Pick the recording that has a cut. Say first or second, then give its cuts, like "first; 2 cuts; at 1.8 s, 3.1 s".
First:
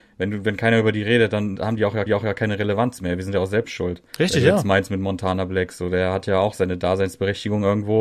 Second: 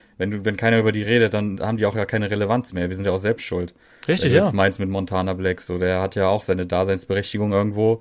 first; 2 cuts; at 2.1 s, 4.1 s